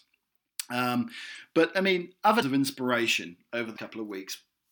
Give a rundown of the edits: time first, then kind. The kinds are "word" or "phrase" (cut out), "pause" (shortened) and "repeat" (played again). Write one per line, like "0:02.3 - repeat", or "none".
0:02.4 - word
0:03.8 - word